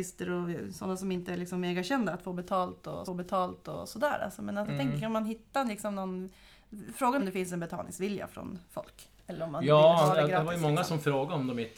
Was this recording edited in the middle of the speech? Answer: yes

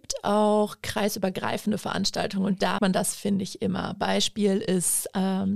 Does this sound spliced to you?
yes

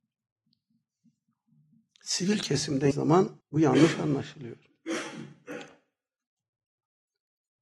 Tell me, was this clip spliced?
yes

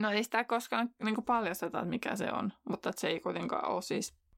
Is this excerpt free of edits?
yes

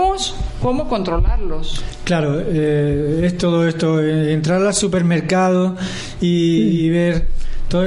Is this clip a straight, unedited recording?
yes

